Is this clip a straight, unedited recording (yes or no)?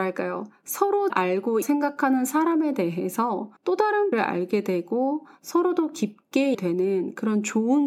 no